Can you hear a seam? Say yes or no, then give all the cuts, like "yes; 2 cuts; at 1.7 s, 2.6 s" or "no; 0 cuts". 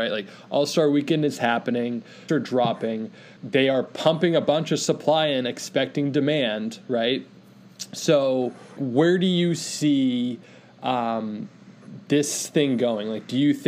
yes; 3 cuts; at 2.3 s, 3.4 s, 8.8 s